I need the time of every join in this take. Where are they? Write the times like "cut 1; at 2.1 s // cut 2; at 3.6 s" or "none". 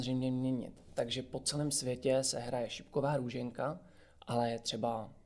none